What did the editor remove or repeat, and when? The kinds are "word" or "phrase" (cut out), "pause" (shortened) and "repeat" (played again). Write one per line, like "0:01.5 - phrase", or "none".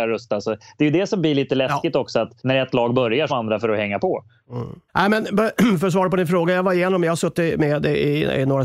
0:02.4 - pause
0:03.3 - phrase
0:04.9 - pause

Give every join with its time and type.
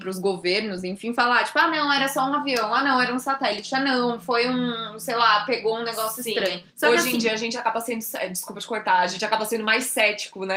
0:06.7 - pause

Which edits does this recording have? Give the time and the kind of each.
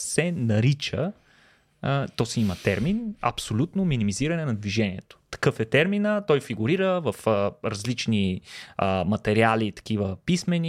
none

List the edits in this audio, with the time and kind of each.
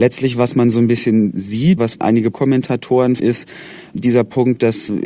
0:01.8 - word
0:02.3 - word
0:03.2 - word

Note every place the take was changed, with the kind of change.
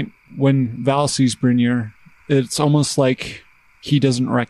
none

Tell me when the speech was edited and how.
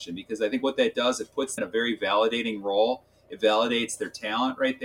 0:01.6 - word

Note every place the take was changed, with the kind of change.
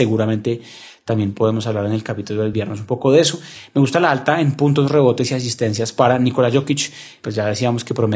none

